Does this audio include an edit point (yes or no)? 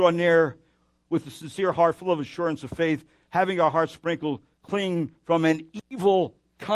no